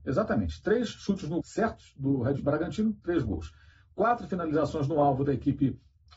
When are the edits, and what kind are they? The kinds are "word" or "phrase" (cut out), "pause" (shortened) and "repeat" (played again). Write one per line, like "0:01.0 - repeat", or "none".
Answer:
0:01.4 - word
0:02.4 - word

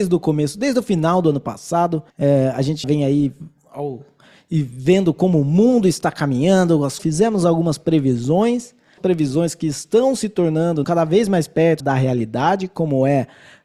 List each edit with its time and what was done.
0:02.1 - pause
0:02.8 - word
0:07.0 - phrase
0:09.0 - phrase
0:10.8 - phrase
0:11.8 - word

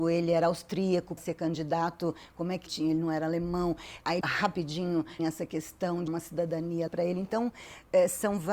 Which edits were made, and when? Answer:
0:01.2 - word
0:02.7 - word
0:04.2 - word
0:05.2 - word
0:06.1 - word
0:06.9 - word

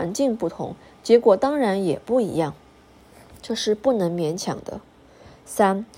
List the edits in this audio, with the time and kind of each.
none

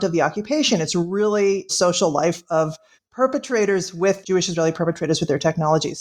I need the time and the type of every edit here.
0:01.7 - phrase
0:02.9 - pause
0:04.2 - phrase

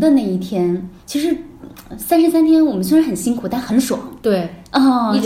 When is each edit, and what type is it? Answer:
0:01.0 - pause

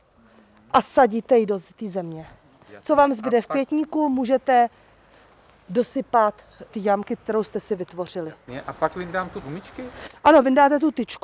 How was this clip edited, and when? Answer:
0:06.7 - word
0:09.4 - phrase

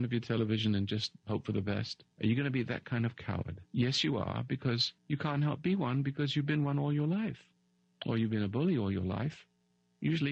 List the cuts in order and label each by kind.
0:02.1 - pause
0:03.7 - pause
0:05.0 - pause
0:07.6 - pause

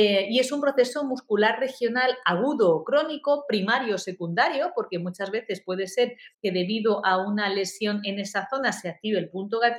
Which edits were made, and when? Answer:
0:06.3 - pause

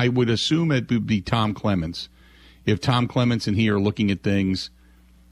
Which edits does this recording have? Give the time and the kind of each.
none

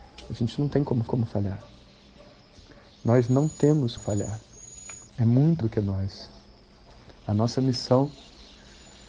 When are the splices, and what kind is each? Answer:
0:01.1 - repeat
0:04.0 - word
0:05.1 - pause
0:05.6 - word

